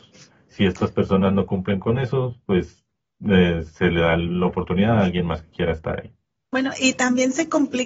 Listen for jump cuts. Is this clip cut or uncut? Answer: uncut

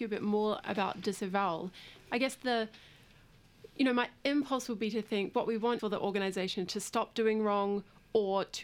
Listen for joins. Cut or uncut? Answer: cut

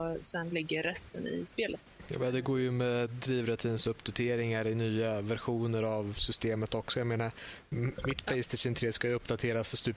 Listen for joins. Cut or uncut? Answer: uncut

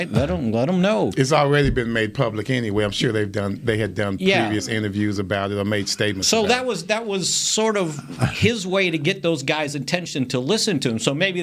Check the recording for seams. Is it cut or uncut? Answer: uncut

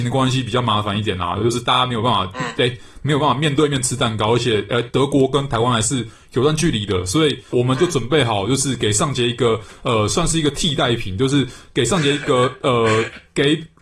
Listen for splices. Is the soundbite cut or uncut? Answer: uncut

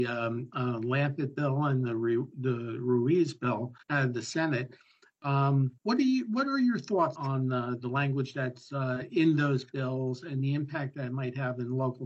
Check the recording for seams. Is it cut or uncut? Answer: cut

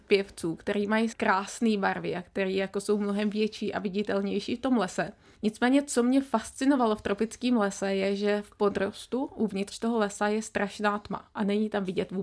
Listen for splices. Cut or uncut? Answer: uncut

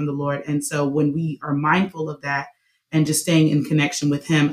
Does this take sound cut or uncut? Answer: uncut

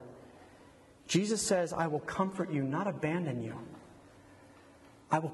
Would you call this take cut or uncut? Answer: uncut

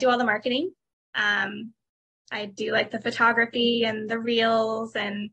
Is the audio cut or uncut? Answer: uncut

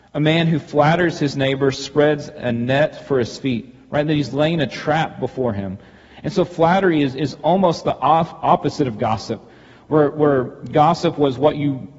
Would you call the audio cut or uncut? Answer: uncut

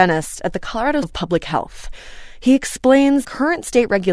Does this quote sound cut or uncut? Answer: cut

